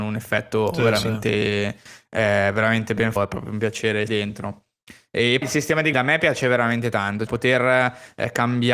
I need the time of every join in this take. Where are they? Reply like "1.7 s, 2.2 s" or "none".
3.2 s, 4.1 s, 5.4 s, 5.9 s, 7.3 s